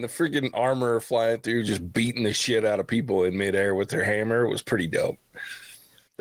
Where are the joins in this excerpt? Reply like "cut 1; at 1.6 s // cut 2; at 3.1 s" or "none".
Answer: none